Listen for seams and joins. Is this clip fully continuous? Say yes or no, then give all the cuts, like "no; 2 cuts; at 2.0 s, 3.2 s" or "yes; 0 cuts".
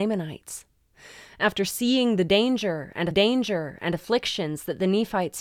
no; 1 cut; at 3.1 s